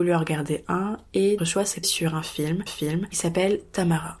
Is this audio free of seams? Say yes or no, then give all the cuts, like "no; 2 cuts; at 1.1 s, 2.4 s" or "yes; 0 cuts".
no; 3 cuts; at 1.4 s, 1.8 s, 2.7 s